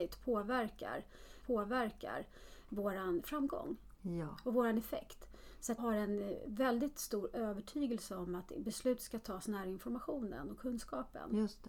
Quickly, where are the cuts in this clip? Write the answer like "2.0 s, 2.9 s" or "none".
1.4 s, 5.8 s